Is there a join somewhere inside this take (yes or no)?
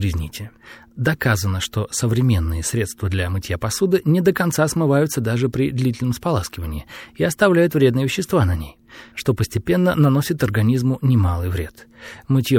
no